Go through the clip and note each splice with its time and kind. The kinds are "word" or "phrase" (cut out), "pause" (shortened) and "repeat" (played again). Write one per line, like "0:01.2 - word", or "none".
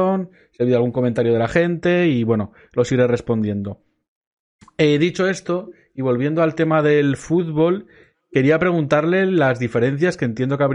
none